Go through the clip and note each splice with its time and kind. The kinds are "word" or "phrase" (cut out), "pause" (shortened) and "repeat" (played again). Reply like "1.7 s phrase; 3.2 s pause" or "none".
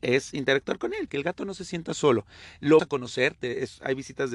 1.1 s word; 2.8 s word